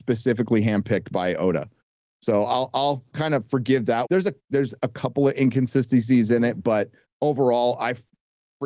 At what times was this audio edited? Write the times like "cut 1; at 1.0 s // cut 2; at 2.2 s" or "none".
cut 1; at 3.1 s // cut 2; at 4.0 s